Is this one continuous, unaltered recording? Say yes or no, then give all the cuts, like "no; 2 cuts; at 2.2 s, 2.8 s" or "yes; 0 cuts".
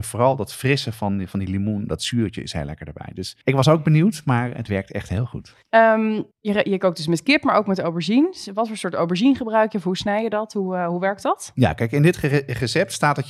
no; 2 cuts; at 3.4 s, 6.3 s